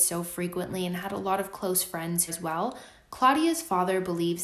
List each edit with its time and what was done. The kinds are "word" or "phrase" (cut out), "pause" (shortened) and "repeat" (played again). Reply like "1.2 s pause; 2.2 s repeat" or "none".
2.3 s phrase